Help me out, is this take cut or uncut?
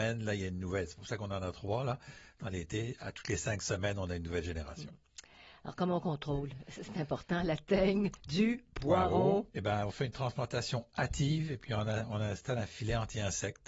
uncut